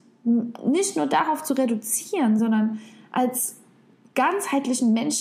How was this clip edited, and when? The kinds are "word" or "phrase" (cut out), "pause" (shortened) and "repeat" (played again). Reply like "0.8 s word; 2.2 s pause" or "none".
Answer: none